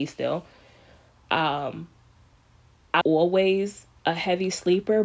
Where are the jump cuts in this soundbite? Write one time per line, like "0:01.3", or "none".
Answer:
0:03.0

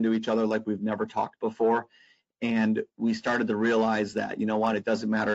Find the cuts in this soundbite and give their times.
none

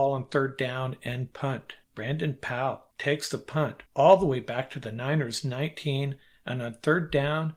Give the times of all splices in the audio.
0:01.8
0:02.9
0:03.9

